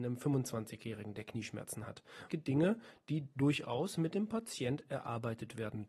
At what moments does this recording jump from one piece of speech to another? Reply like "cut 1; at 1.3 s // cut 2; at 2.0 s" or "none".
cut 1; at 2.3 s